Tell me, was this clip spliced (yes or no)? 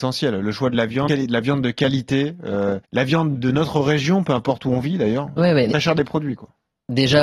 yes